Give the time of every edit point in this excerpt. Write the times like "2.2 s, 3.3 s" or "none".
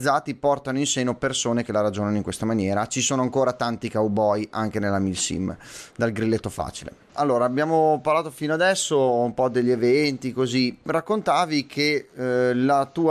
none